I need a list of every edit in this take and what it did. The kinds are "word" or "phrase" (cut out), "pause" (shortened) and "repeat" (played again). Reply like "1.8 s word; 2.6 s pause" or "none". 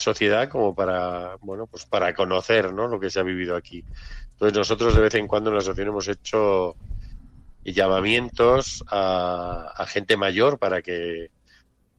9.7 s word